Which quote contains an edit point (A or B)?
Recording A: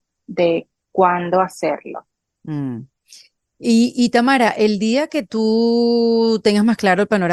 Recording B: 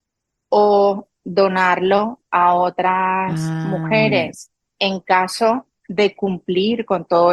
B